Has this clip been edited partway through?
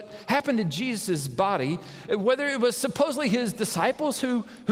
no; 0 cuts

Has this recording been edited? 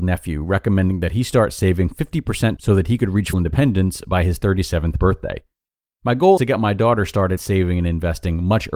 yes; 4 cuts; at 2.6 s, 3.3 s, 6.4 s, 7.4 s

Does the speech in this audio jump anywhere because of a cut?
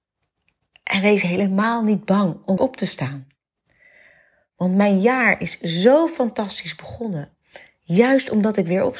yes; 1 cut; at 2.6 s

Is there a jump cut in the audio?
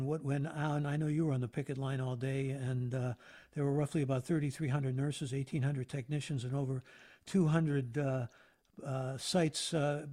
no; 0 cuts

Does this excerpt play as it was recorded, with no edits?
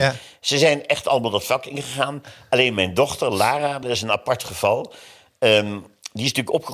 yes; 0 cuts

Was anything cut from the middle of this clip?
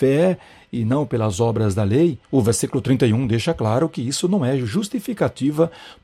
yes; 1 cut; at 2.2 s

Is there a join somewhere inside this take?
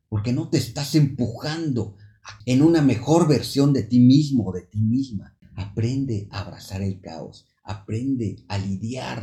yes; 1 cut; at 2.4 s

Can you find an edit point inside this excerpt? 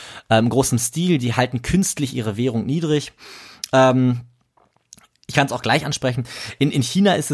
no; 0 cuts

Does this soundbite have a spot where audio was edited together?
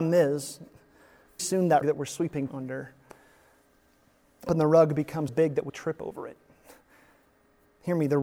yes; 6 cuts; at 1.4 s, 1.8 s, 2.5 s, 4.5 s, 5.3 s, 5.7 s

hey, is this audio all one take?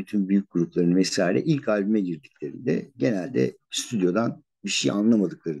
no; 1 cut; at 4.5 s

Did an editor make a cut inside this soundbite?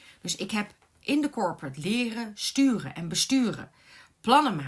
no; 0 cuts

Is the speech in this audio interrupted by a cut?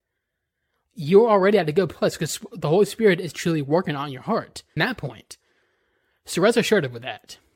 yes; 1 cut; at 4.8 s

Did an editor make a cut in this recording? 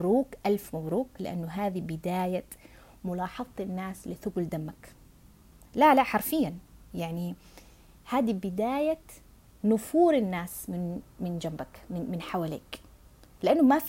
yes; 1 cut; at 6.8 s

